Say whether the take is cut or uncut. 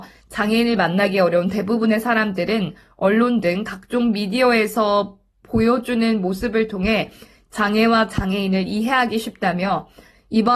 uncut